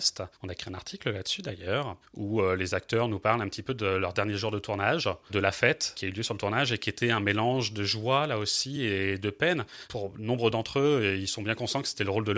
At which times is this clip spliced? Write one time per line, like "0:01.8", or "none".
none